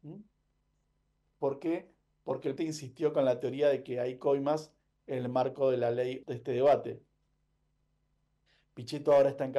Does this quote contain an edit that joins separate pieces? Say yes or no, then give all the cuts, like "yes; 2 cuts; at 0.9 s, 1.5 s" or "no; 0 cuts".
yes; 2 cuts; at 2.6 s, 6.2 s